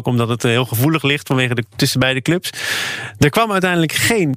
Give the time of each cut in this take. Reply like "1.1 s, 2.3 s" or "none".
1.7 s